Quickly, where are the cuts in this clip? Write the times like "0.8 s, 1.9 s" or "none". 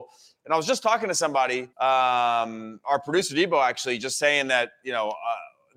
1.7 s